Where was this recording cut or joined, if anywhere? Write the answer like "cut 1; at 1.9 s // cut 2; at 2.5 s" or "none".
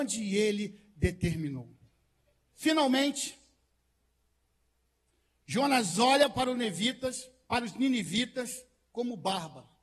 none